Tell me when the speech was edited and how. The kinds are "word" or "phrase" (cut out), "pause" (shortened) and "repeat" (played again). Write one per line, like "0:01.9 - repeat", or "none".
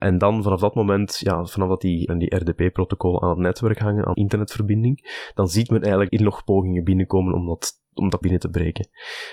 0:02.1 - word
0:04.1 - word
0:06.1 - word
0:08.2 - word